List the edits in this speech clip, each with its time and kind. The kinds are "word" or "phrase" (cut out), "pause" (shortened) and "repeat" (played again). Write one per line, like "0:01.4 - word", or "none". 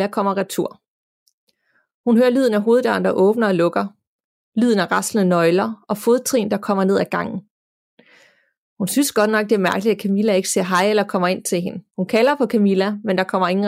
0:11.9 - pause